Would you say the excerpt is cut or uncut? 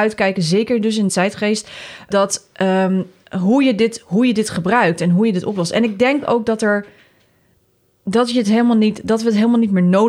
cut